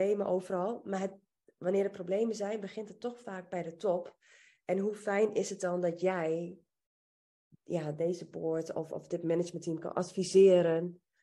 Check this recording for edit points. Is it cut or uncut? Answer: uncut